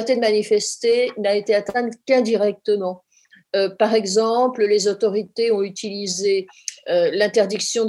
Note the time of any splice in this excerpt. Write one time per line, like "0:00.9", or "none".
none